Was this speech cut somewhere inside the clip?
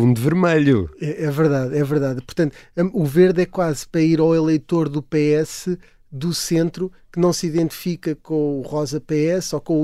no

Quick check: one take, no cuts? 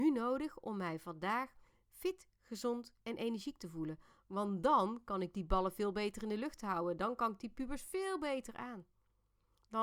yes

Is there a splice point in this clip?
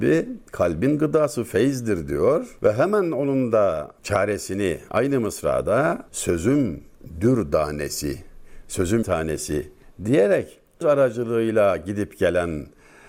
yes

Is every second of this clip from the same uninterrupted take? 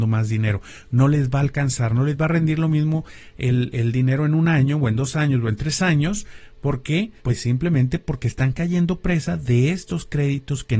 no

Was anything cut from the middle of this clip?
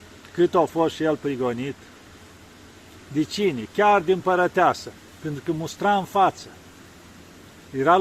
no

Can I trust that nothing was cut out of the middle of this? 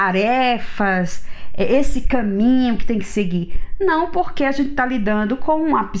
yes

